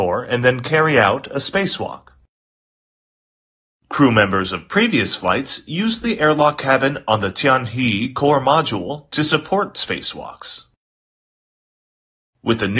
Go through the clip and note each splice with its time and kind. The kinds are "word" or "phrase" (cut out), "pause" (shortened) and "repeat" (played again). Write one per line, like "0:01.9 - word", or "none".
none